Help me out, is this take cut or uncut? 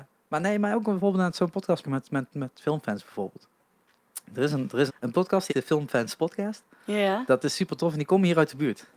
cut